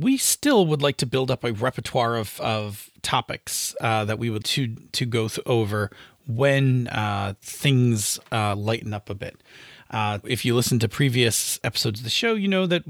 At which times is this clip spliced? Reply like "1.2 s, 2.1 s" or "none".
4.4 s, 10.2 s, 11.6 s